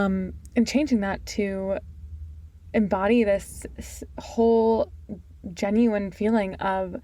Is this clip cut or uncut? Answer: uncut